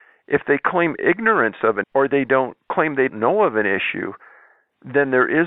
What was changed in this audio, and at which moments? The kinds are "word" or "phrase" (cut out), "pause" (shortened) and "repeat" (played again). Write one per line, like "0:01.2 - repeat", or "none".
0:01.8 - word
0:03.1 - word